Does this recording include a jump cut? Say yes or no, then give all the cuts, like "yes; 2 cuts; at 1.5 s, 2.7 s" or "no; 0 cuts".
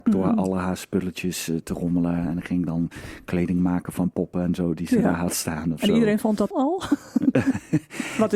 yes; 2 cuts; at 4.1 s, 6.5 s